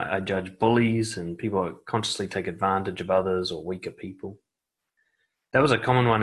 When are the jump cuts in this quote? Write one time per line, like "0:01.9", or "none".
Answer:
none